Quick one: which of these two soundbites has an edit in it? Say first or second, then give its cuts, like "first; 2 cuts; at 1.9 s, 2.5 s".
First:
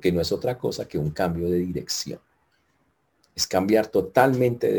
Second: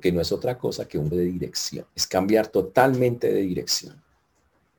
second; 2 cuts; at 1.1 s, 1.9 s